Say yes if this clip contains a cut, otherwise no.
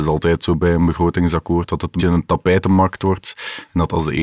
yes